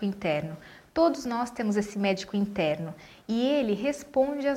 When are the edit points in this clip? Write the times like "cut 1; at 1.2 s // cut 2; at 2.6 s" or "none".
none